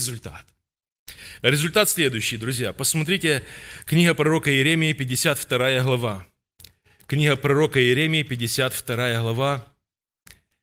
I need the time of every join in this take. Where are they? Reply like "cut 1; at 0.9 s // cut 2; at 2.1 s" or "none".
none